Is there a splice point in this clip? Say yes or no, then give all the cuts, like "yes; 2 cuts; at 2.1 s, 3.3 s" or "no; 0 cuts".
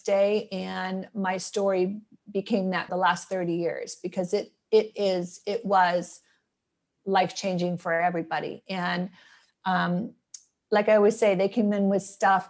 yes; 1 cut; at 2.9 s